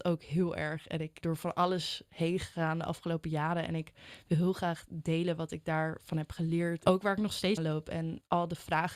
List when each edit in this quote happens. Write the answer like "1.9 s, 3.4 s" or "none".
1.2 s, 7.6 s

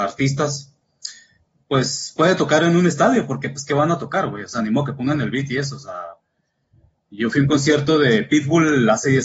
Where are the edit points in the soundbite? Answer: none

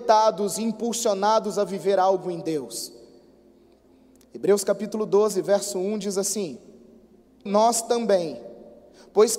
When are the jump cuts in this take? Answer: 7.5 s

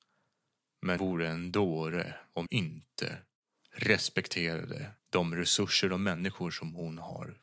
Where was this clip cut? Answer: 1.0 s, 2.5 s, 5.0 s

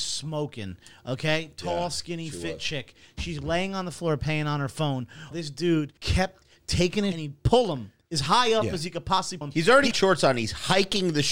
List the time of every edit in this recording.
5.3 s, 6.0 s, 7.1 s, 9.4 s, 9.9 s

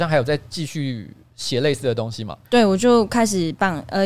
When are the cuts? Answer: 2.4 s

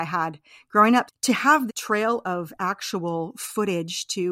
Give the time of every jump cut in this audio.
1.1 s, 1.7 s

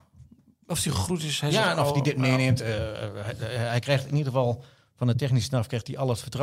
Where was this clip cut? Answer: none

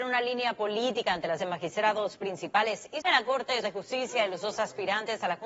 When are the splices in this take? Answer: 1.4 s, 3.0 s, 3.6 s

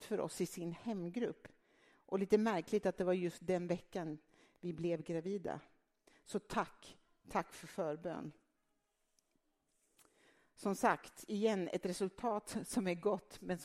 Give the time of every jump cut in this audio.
none

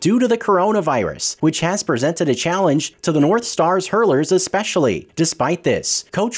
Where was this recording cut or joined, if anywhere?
none

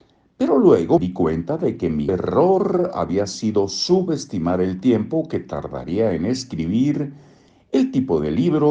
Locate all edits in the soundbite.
1.0 s, 2.1 s

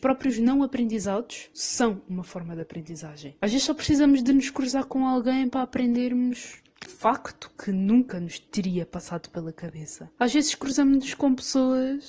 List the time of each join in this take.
6.9 s

